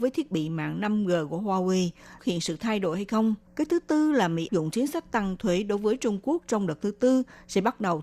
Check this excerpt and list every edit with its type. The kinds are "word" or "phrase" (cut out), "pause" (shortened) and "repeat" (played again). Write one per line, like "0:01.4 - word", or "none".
0:02.2 - phrase
0:03.5 - pause
0:04.5 - word